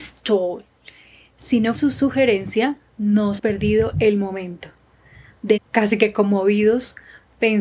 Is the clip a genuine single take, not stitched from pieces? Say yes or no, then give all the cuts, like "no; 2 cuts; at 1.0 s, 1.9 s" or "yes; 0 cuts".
no; 3 cuts; at 1.7 s, 3.4 s, 5.6 s